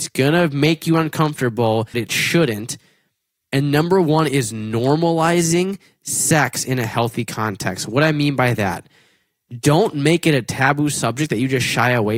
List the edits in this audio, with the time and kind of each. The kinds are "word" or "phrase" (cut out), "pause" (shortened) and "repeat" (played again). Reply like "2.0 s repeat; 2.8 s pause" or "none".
1.9 s word